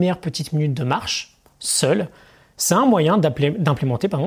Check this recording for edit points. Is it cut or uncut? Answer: uncut